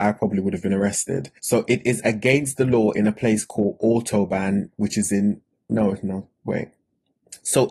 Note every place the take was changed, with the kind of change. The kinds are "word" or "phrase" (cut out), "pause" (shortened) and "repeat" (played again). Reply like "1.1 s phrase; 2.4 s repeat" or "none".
1.4 s pause